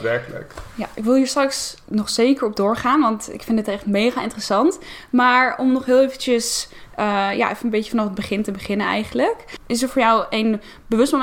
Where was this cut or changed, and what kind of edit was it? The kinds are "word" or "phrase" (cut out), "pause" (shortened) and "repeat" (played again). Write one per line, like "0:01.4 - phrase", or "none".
0:01.8 - pause